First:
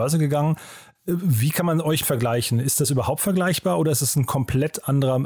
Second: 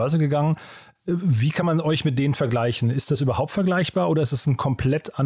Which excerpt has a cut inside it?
first; 1 cut; at 2.0 s

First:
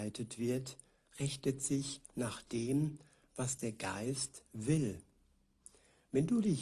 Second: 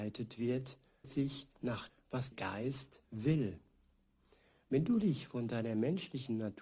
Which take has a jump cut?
second; 3 cuts; at 1.0 s, 1.9 s, 2.3 s

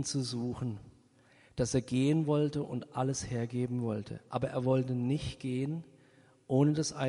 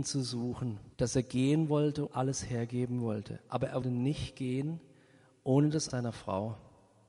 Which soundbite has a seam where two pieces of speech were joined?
second; 4 cuts; at 0.9 s, 2.1 s, 3.8 s, 5.9 s

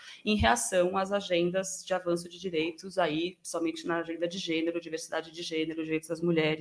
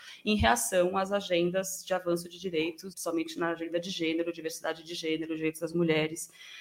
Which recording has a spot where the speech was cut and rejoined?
second; 1 cut; at 2.9 s

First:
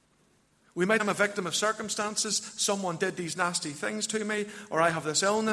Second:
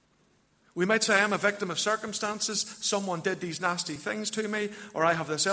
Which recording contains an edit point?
first; 1 cut; at 1.0 s

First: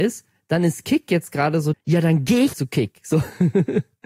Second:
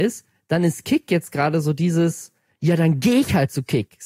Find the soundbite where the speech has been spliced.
first; 2 cuts; at 1.7 s, 2.5 s

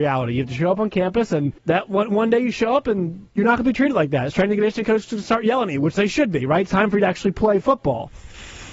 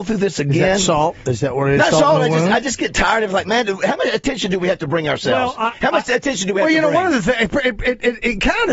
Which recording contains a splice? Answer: first; 1 cut; at 1.6 s

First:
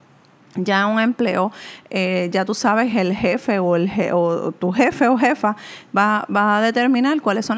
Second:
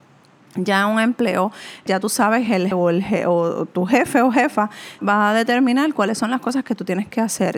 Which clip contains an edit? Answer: second; 3 cuts; at 1.9 s, 2.7 s, 5.0 s

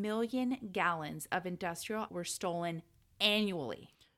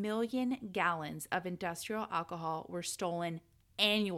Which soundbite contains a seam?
first; 1 cut; at 2.1 s

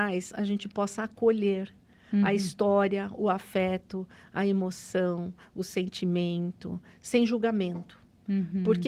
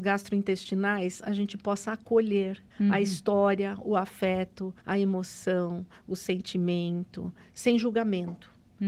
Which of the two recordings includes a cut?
second; 2 cuts; at 2.7 s, 4.8 s

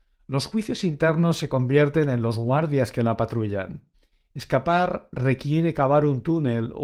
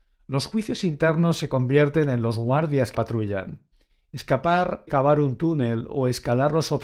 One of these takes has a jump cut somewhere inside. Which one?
second; 2 cuts; at 2.9 s, 4.9 s

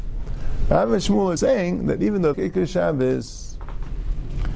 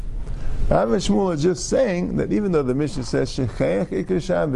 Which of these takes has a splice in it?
first; 2 cuts; at 1.4 s, 2.3 s

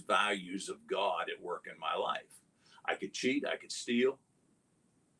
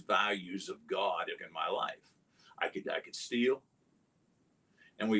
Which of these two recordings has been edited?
second; 2 cuts; at 1.4 s, 2.8 s

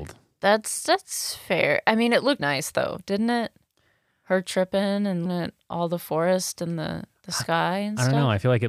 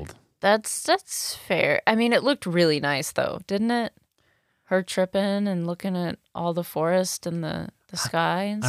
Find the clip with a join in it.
first; 2 cuts; at 2.4 s, 5.3 s

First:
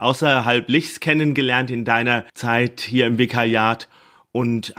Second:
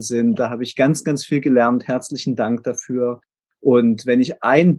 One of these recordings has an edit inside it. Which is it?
first; 1 cut; at 2.3 s

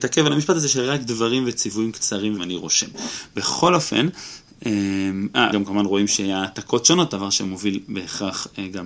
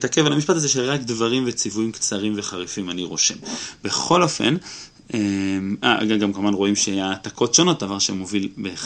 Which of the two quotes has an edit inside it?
first; 2 cuts; at 2.4 s, 5.5 s

